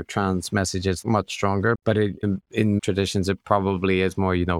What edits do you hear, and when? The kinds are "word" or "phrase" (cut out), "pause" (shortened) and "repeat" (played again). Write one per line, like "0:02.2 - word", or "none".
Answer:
0:01.0 - word
0:02.2 - word
0:02.8 - word